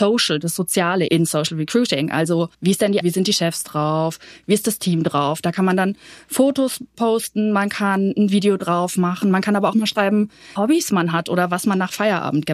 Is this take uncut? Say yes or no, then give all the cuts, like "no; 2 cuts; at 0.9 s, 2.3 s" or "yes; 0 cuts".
no; 6 cuts; at 1.1 s, 2.5 s, 3.0 s, 6.9 s, 9.7 s, 10.6 s